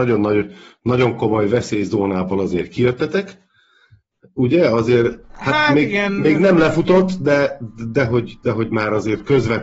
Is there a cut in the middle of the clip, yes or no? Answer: no